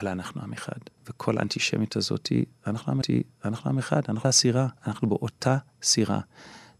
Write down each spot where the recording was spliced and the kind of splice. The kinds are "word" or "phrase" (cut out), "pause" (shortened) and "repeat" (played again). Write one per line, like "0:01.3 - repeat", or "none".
0:01.0 - pause
0:03.0 - repeat
0:04.2 - word
0:04.8 - pause